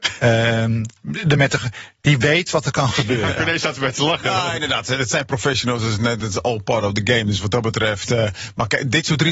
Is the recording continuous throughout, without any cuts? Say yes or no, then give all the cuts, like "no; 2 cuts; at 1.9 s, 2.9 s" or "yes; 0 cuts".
yes; 0 cuts